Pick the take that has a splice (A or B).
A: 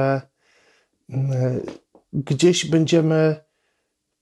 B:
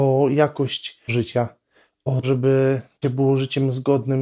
B